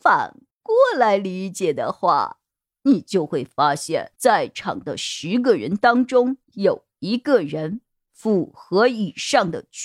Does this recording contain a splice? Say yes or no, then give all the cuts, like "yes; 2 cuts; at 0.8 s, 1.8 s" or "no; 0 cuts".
yes; 2 cuts; at 4.1 s, 6.4 s